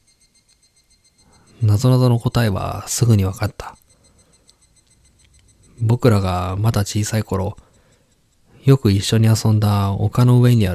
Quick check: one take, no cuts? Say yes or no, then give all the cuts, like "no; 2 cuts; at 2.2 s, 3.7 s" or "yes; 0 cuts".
yes; 0 cuts